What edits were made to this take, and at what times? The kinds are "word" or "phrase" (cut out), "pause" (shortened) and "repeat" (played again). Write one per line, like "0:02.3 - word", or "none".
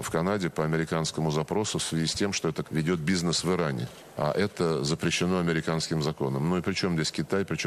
0:02.6 - word